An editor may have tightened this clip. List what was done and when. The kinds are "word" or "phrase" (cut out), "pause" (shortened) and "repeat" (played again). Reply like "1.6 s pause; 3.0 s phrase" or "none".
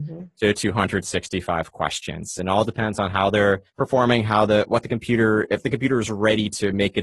3.7 s pause